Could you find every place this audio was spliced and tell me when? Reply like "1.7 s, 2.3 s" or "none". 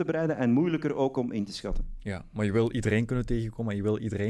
none